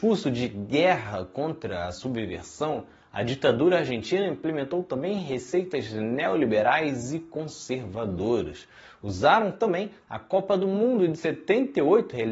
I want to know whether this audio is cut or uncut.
uncut